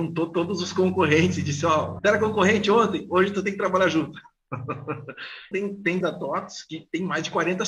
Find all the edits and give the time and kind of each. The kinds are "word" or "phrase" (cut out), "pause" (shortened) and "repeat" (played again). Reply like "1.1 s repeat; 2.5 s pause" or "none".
2.0 s word; 5.5 s word; 6.0 s word